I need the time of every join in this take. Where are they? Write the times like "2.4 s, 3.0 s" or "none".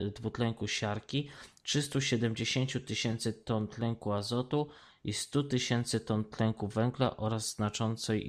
none

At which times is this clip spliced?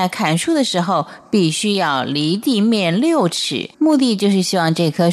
3.7 s

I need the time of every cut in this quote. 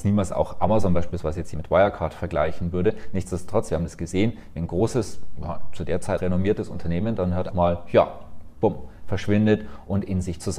1.5 s, 6.2 s, 7.5 s

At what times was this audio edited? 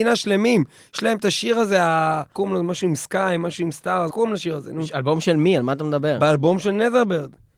2.4 s, 4.1 s

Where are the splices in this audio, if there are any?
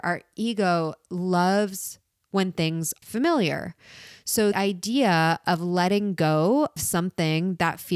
3.0 s, 4.5 s, 6.8 s

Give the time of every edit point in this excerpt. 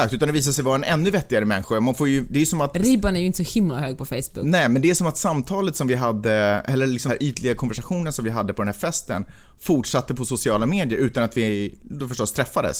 7.1 s

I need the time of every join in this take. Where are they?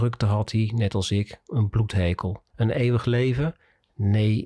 2.5 s

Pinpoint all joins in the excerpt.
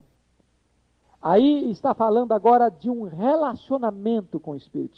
none

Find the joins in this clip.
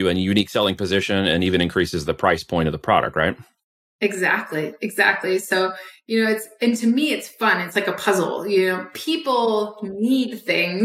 none

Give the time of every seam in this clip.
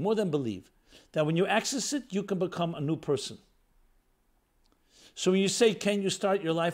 none

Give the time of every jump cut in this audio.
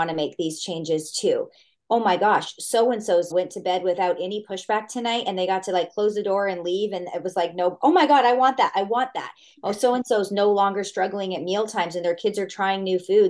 3.3 s

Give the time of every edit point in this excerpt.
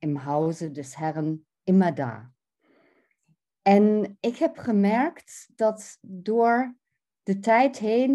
none

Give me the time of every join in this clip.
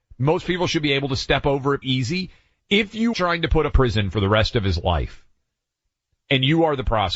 1.8 s, 3.1 s, 3.7 s

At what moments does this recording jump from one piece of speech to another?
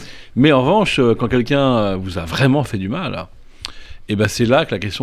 none

